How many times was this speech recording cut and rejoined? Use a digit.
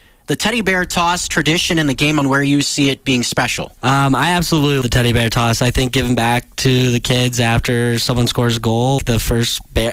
4